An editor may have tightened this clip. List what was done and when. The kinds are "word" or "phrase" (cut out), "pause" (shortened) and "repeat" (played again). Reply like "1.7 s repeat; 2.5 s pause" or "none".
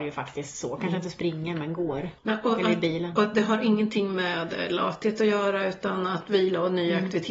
2.2 s pause